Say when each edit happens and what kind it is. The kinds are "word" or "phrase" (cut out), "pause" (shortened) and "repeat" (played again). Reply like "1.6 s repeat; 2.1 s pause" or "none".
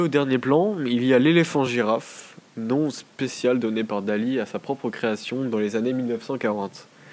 none